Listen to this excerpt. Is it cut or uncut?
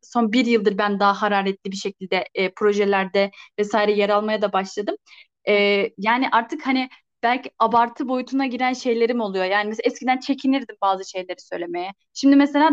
uncut